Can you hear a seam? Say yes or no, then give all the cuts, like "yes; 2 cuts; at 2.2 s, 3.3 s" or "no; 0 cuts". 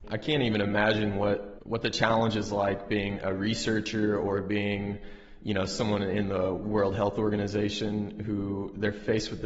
no; 0 cuts